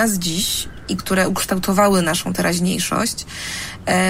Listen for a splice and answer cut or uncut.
uncut